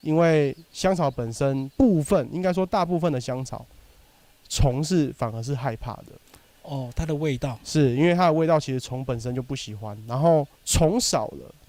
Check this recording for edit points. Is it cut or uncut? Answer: cut